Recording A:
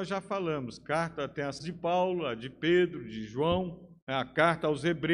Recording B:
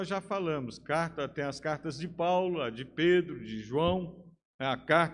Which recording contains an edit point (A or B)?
A